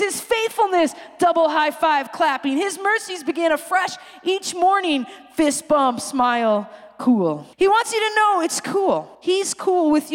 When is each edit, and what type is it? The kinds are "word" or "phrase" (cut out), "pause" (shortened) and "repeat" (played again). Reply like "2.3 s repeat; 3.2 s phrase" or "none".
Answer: 7.5 s pause; 9.1 s pause

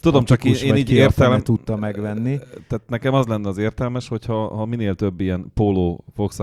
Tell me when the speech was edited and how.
none

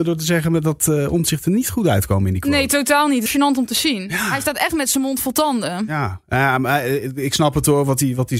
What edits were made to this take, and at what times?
3.3 s phrase

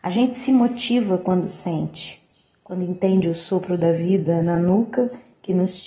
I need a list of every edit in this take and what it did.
none

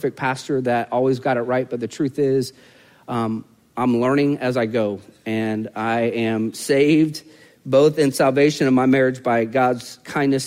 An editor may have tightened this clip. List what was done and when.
none

